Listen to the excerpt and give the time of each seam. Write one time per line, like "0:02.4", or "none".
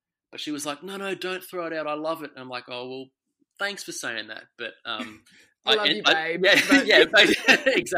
none

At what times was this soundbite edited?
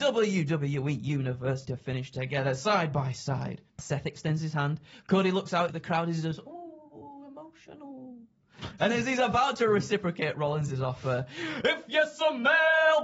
0:01.7
0:03.7
0:05.7
0:08.8

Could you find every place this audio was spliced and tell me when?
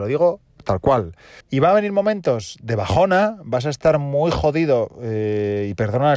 0:01.4

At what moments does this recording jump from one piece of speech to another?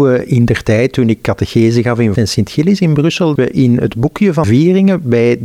0:02.2
0:03.4
0:04.4

